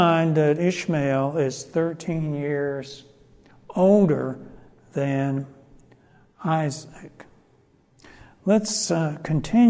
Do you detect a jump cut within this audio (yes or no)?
no